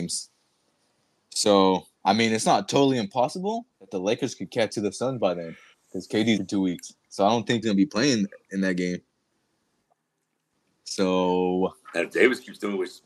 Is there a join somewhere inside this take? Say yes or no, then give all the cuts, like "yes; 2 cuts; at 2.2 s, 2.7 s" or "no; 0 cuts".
yes; 6 cuts; at 1.9 s, 3.7 s, 4.7 s, 5.7 s, 6.4 s, 7.6 s